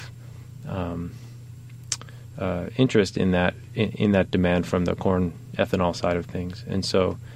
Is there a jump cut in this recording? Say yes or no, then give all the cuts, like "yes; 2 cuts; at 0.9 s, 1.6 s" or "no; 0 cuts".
no; 0 cuts